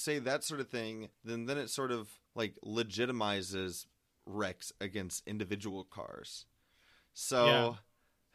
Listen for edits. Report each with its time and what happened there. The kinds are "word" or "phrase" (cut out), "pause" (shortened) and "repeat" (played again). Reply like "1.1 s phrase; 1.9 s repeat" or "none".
1.1 s pause; 2.3 s pause